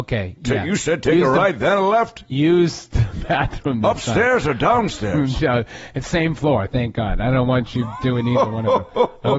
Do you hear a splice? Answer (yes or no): no